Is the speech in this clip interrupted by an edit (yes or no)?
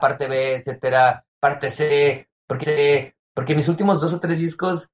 yes